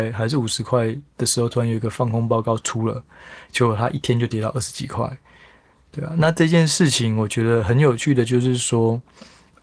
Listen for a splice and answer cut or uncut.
uncut